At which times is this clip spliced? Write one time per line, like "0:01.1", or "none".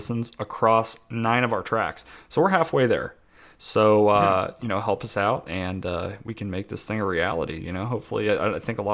none